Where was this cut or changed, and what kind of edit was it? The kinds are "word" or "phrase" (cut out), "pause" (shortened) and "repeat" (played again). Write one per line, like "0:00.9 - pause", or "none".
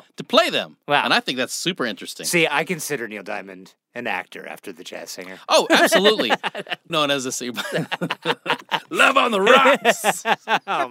0:02.5 - word
0:06.9 - word